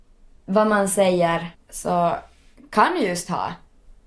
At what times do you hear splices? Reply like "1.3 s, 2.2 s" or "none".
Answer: 1.5 s